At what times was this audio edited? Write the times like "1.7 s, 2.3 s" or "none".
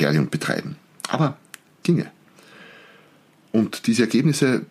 1.8 s